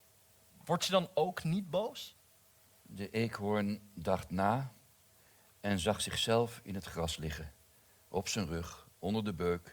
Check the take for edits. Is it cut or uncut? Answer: uncut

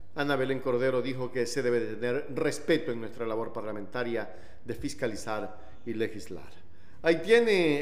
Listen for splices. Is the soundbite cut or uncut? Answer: uncut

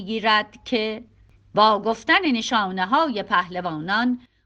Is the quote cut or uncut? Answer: uncut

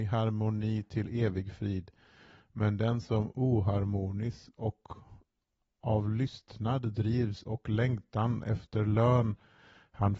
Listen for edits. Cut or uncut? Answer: uncut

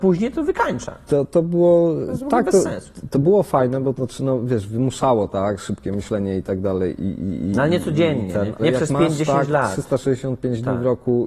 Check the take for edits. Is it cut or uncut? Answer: cut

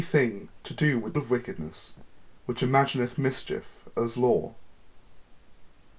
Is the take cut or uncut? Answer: cut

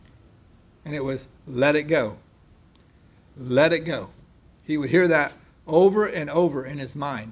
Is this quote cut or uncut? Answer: uncut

